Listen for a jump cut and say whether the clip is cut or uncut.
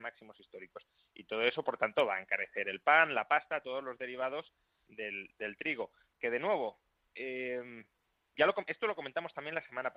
uncut